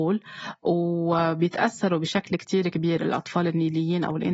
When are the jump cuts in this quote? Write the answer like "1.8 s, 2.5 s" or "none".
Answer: none